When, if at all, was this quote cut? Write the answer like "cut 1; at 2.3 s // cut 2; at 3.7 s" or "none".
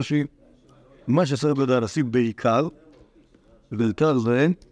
none